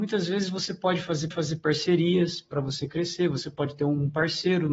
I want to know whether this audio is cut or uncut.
cut